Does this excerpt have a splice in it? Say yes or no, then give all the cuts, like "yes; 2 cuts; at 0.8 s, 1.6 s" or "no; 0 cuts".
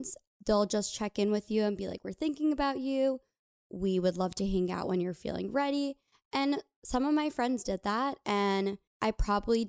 no; 0 cuts